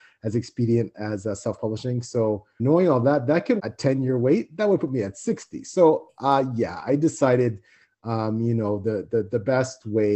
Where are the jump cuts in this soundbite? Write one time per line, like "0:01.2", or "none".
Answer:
0:02.6
0:03.6